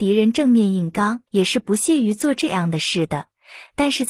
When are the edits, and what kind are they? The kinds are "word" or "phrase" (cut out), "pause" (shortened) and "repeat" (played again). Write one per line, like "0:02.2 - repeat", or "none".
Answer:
0:01.3 - pause